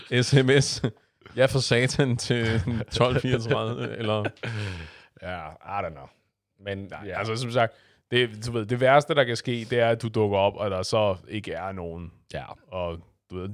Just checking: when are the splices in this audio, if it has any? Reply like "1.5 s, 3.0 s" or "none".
none